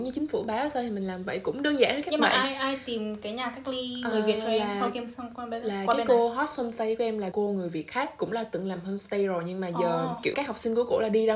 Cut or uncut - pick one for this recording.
cut